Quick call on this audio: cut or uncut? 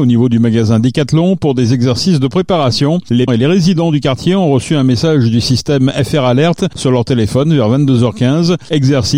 cut